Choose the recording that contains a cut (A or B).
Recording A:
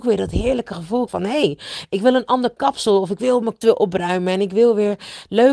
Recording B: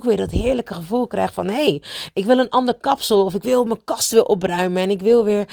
A